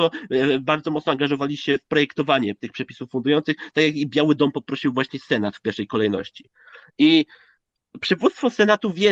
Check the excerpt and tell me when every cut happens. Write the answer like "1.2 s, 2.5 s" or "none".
none